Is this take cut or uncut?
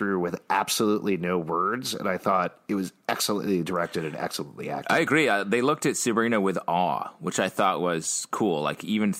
uncut